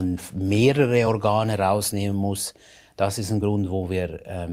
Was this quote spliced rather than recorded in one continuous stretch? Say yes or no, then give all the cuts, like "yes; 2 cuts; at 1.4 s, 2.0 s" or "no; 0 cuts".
no; 0 cuts